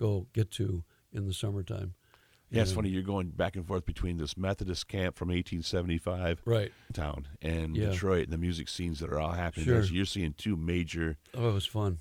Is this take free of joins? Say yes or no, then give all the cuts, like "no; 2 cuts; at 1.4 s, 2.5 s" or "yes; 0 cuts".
yes; 0 cuts